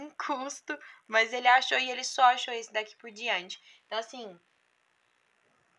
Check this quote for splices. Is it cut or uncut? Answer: uncut